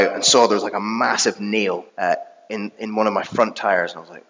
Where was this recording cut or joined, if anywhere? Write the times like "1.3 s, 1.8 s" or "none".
1.9 s